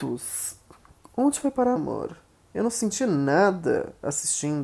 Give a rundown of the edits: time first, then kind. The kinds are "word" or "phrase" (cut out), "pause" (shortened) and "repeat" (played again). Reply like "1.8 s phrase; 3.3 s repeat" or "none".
1.8 s phrase